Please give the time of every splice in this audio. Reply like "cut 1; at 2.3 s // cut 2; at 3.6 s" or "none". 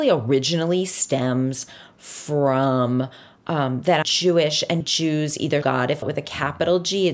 cut 1; at 4.0 s // cut 2; at 4.8 s // cut 3; at 5.6 s // cut 4; at 6.0 s